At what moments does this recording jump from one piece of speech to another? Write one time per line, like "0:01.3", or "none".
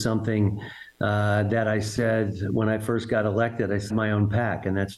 0:03.9